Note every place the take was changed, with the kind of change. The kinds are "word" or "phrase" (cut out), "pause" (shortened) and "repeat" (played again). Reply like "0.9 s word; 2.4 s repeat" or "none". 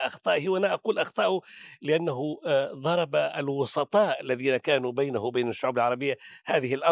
none